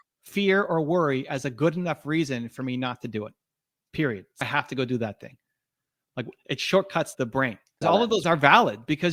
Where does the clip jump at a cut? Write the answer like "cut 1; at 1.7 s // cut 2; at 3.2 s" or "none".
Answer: cut 1; at 4.4 s // cut 2; at 7.1 s // cut 3; at 7.8 s // cut 4; at 8.2 s